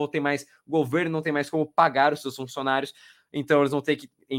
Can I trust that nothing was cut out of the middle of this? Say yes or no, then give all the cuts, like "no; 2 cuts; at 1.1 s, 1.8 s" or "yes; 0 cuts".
yes; 0 cuts